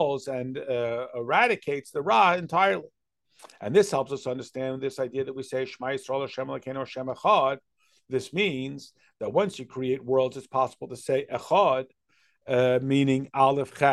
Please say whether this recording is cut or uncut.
uncut